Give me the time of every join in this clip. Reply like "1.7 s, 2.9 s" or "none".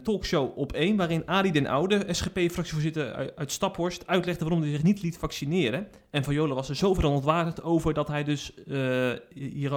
none